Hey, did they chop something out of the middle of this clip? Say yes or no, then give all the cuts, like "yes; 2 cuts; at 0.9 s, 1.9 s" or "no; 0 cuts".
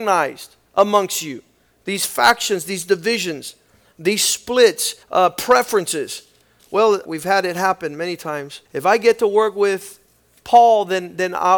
yes; 3 cuts; at 5.0 s, 7.1 s, 8.7 s